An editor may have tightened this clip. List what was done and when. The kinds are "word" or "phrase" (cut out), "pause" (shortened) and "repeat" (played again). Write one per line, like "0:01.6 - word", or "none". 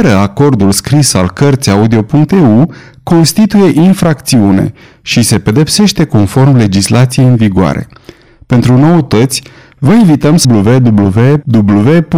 0:10.4 - word